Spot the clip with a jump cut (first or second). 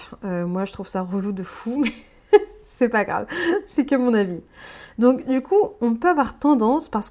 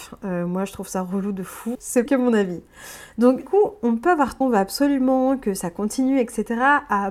second